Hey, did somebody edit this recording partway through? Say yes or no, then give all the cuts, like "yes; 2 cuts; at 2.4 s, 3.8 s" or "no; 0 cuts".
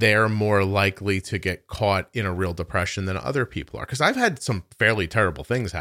no; 0 cuts